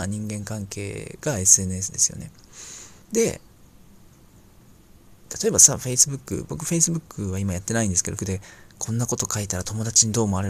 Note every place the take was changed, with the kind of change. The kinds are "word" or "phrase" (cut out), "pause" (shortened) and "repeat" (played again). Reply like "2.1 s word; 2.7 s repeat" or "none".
3.0 s pause; 8.2 s word